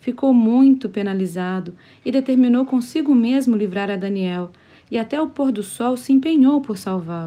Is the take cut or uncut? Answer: uncut